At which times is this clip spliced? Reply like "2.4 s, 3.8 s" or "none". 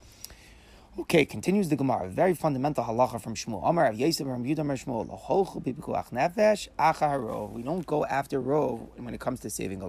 none